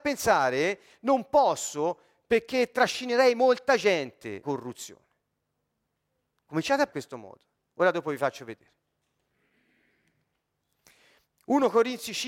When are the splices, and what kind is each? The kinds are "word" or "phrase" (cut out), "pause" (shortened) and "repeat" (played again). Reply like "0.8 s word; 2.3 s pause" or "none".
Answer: 4.4 s word; 6.9 s word